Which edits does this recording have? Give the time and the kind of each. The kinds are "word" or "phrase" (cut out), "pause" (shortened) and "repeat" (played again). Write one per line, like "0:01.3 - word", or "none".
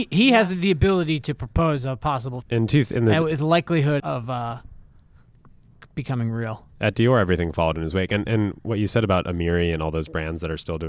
0:02.4 - word
0:04.0 - word